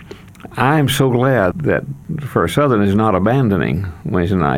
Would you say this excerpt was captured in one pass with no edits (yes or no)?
no